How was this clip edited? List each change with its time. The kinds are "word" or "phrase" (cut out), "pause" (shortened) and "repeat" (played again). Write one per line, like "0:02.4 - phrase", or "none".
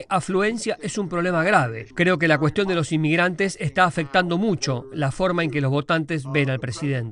0:01.9 - pause